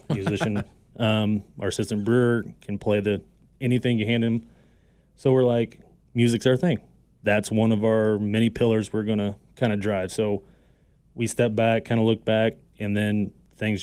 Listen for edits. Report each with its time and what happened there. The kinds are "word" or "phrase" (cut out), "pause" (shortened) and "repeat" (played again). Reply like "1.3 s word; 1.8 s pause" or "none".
none